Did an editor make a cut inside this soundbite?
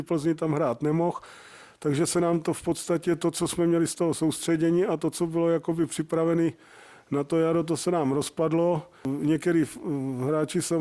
no; 0 cuts

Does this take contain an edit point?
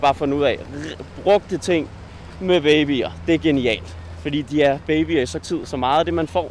yes; 1 cut; at 5.4 s

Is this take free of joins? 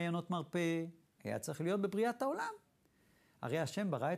yes; 0 cuts

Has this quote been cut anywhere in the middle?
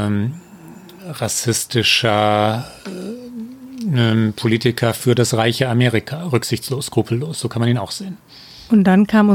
no; 0 cuts

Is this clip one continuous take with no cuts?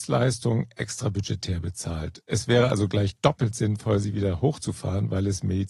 yes; 0 cuts

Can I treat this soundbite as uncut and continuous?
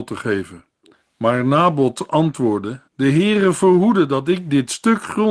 no; 2 cuts; at 0.9 s, 2.9 s

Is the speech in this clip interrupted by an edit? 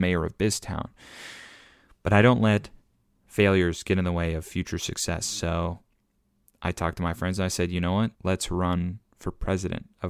yes; 1 cut; at 8.1 s

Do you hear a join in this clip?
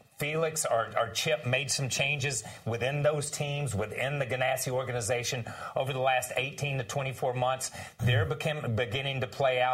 no; 0 cuts

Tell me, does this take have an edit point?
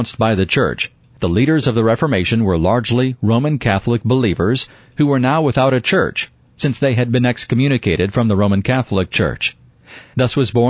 no; 0 cuts

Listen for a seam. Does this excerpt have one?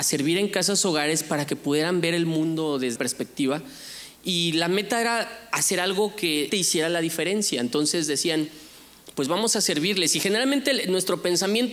yes; 2 cuts; at 3.0 s, 6.5 s

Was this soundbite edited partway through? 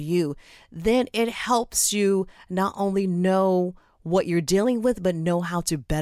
no; 0 cuts

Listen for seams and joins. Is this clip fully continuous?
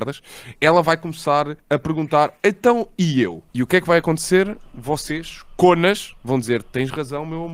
no; 3 cuts; at 1.6 s, 3.5 s, 6.2 s

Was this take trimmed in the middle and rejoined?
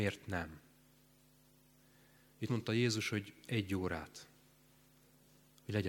yes; 1 cut; at 2.5 s

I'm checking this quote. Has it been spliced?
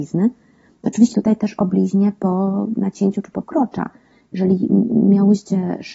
yes; 2 cuts; at 1.1 s, 3.4 s

